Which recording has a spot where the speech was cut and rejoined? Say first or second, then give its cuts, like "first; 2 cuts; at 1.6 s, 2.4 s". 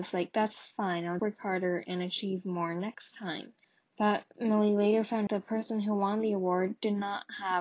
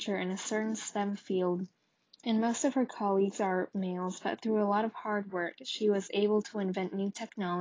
first; 3 cuts; at 1.2 s, 3.6 s, 5.3 s